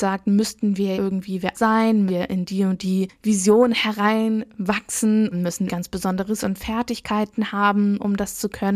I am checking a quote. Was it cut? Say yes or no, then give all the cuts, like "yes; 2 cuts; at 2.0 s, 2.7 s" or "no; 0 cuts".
yes; 6 cuts; at 0.9 s, 1.5 s, 2.1 s, 5.3 s, 5.7 s, 6.4 s